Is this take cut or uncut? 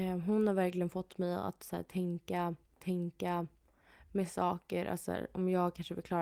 cut